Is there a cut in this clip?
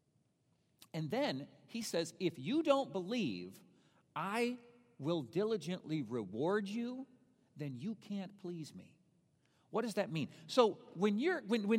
no; 0 cuts

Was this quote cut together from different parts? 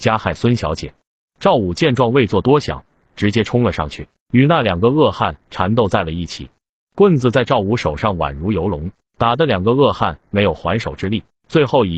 no; 0 cuts

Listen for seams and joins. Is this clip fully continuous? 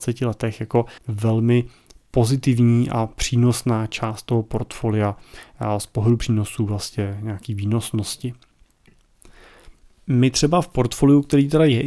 no; 1 cut; at 1.0 s

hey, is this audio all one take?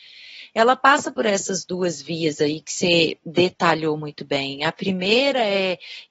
yes; 0 cuts

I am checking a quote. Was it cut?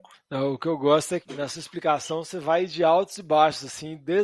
yes; 1 cut; at 1.2 s

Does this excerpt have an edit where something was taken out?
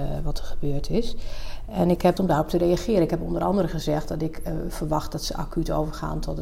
yes; 1 cut; at 2.2 s

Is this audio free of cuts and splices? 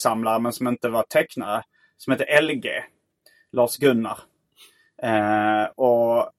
yes; 0 cuts

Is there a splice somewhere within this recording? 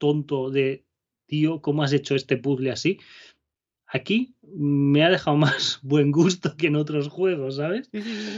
no; 0 cuts

